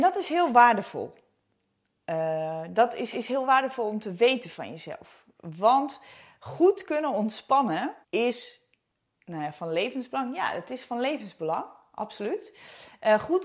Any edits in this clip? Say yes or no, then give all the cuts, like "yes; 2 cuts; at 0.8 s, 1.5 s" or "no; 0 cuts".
yes; 2 cuts; at 3.1 s, 8.0 s